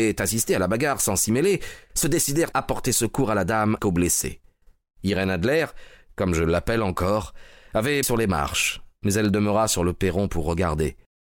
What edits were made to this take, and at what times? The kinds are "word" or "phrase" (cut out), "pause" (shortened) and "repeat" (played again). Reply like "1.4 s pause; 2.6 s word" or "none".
2.5 s word; 3.8 s word; 8.0 s word